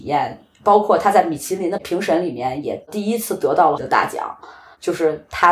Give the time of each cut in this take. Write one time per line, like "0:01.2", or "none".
0:03.8